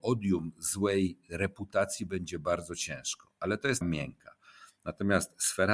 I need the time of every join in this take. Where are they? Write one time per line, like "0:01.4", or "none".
0:03.8